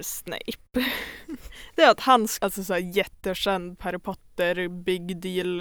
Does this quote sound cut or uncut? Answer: cut